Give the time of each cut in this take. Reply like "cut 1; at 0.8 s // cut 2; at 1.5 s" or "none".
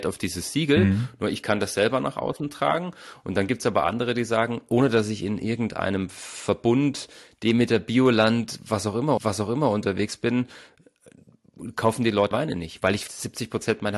cut 1; at 9.2 s // cut 2; at 12.3 s // cut 3; at 13.1 s